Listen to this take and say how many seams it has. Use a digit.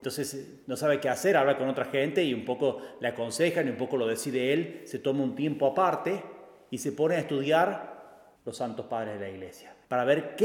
0